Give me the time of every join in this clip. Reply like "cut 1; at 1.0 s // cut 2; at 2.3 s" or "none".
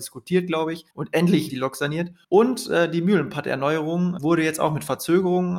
cut 1; at 0.9 s // cut 2; at 1.5 s // cut 3; at 2.2 s // cut 4; at 4.2 s

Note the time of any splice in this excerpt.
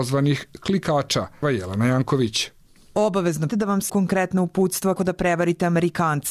cut 1; at 1.4 s // cut 2; at 3.5 s // cut 3; at 3.9 s // cut 4; at 5.0 s

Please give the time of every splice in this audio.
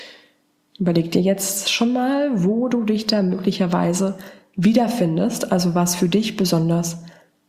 none

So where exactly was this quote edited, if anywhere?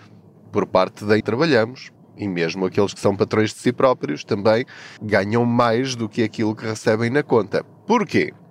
cut 1; at 1.2 s // cut 2; at 2.0 s // cut 3; at 5.0 s

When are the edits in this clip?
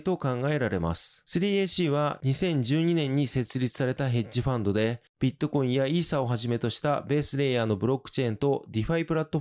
none

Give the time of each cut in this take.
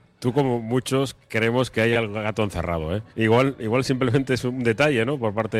cut 1; at 3.1 s

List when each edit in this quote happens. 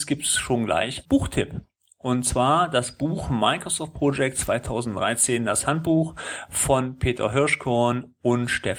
cut 1; at 1.0 s

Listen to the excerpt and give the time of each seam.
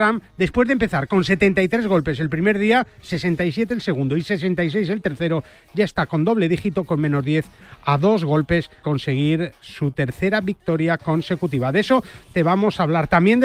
cut 1; at 8.8 s

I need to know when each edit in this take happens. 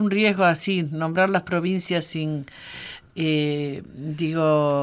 none

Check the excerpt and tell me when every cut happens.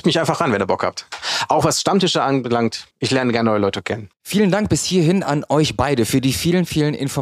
cut 1; at 2.9 s // cut 2; at 4.1 s

